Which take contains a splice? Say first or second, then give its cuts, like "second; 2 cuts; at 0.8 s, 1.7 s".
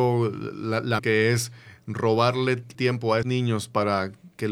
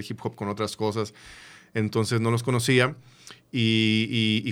first; 3 cuts; at 1.0 s, 2.7 s, 3.2 s